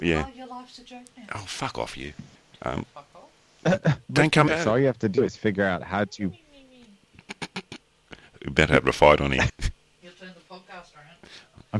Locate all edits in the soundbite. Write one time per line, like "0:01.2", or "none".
0:02.3
0:04.5
0:09.5

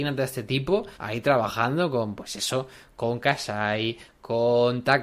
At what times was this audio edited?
0:00.9

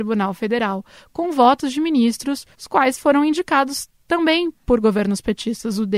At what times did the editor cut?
0:02.5

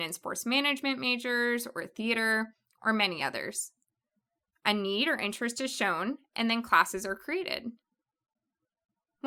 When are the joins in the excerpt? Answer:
none

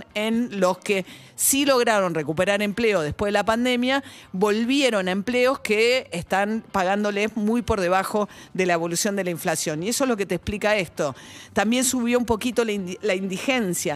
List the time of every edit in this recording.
none

